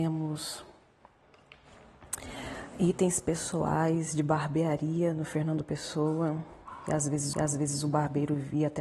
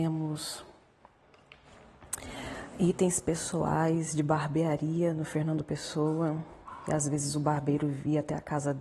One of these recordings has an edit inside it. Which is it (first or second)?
first